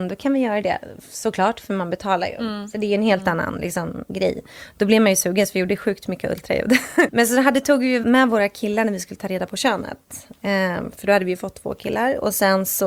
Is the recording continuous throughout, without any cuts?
yes; 0 cuts

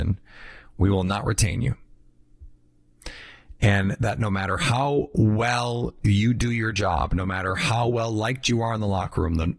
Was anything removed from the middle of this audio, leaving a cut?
no; 0 cuts

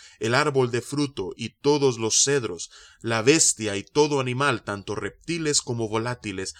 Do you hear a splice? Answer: no; 0 cuts

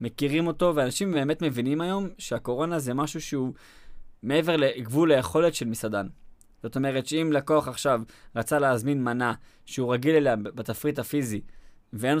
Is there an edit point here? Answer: no; 0 cuts

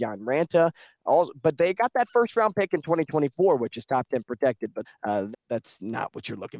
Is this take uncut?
no; 2 cuts; at 4.8 s, 5.3 s

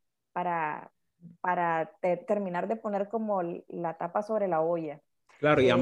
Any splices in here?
yes; 1 cut; at 1.3 s

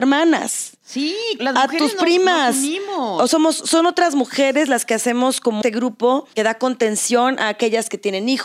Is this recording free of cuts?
no; 4 cuts; at 1.4 s, 3.3 s, 5.6 s, 6.3 s

